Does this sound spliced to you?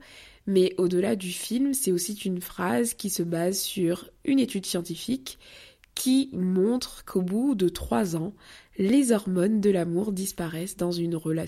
no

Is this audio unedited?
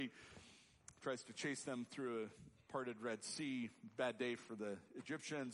yes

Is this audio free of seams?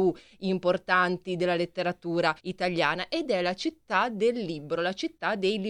no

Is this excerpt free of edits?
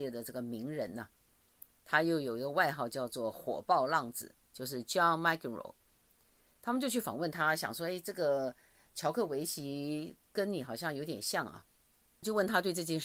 yes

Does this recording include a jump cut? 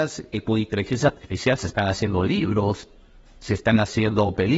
no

